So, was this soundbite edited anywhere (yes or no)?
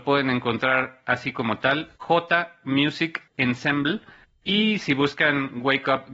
yes